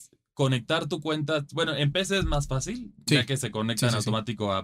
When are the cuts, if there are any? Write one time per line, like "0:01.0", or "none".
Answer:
none